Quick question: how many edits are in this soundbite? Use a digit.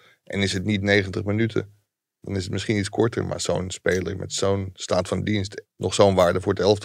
1